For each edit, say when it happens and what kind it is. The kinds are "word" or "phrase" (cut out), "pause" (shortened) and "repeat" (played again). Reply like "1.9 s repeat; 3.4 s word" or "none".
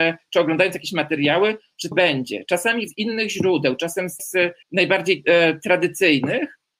1.9 s phrase; 2.9 s word; 4.2 s word; 4.6 s pause